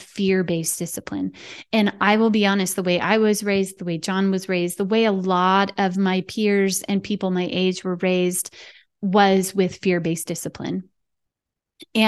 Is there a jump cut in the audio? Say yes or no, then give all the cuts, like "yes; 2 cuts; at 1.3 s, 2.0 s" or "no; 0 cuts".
no; 0 cuts